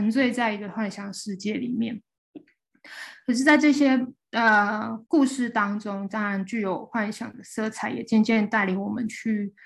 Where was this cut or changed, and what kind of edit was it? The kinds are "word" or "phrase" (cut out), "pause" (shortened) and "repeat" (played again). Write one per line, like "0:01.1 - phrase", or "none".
0:05.0 - pause